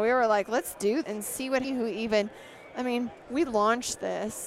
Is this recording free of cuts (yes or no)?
no